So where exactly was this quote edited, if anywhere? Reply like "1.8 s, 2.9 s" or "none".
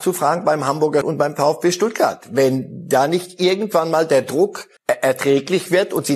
1.0 s, 4.8 s

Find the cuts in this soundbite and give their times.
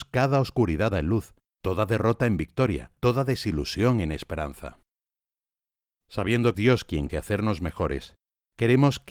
0.9 s, 1.4 s, 3.0 s, 6.5 s, 7.1 s

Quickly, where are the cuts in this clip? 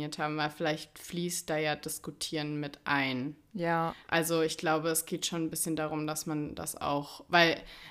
4.0 s

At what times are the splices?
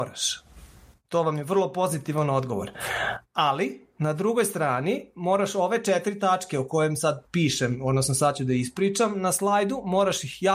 7.3 s

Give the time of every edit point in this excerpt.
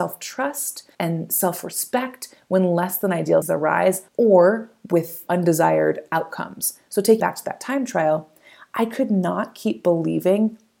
0.9 s, 3.4 s, 4.1 s, 5.3 s, 7.2 s

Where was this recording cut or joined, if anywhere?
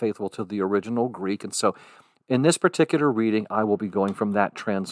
none

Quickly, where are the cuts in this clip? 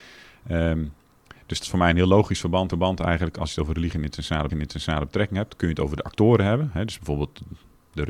1.6 s, 2.7 s, 4.5 s

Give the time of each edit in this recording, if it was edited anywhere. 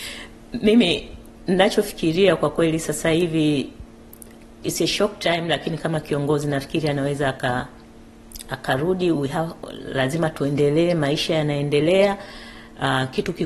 none

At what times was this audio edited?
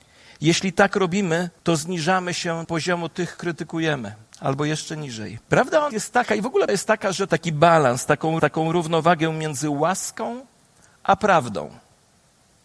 1.6 s, 2.6 s, 3.4 s, 4.2 s, 5.4 s, 5.9 s, 6.7 s, 7.3 s, 8.4 s

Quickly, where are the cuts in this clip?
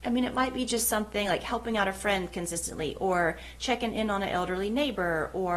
none

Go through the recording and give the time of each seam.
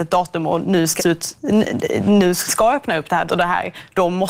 1.0 s, 2.5 s, 3.3 s

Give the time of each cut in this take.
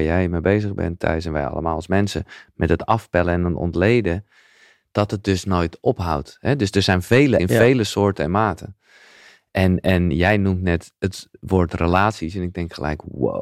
7.4 s

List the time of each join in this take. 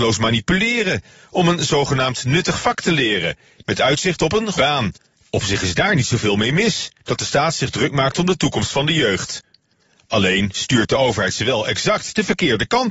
4.5 s

